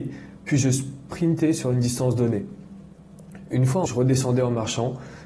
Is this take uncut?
no; 1 cut; at 3.9 s

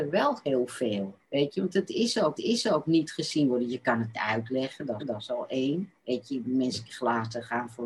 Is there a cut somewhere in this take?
yes; 6 cuts; at 1.2 s, 2.4 s, 4.1 s, 5.0 s, 6.0 s, 6.8 s

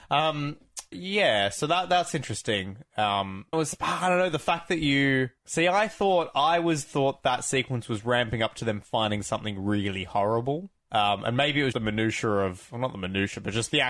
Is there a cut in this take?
yes; 5 cuts; at 0.9 s, 3.5 s, 5.4 s, 10.8 s, 11.7 s

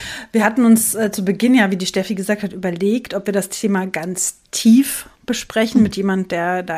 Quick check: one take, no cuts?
no; 1 cut; at 5.1 s

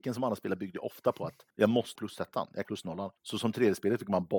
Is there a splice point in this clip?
yes; 4 cuts; at 1.5 s, 2.0 s, 2.6 s, 3.2 s

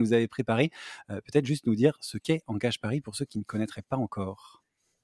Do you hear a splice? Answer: no; 0 cuts

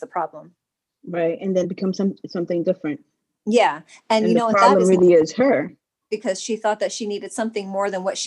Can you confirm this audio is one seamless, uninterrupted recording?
no; 1 cut; at 1.6 s

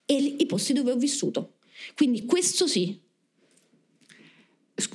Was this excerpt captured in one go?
yes; 0 cuts

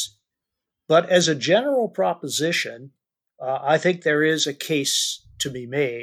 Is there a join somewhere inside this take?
no; 0 cuts

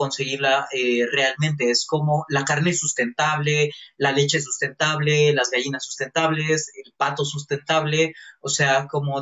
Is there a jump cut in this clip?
no; 0 cuts

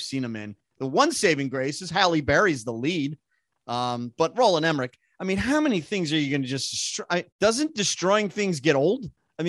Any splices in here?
yes; 1 cut; at 7.3 s

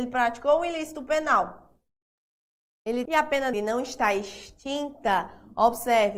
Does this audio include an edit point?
yes; 2 cuts; at 3.1 s, 3.5 s

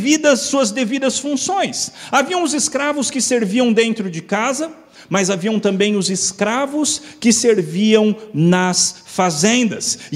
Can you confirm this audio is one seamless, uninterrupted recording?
yes; 0 cuts

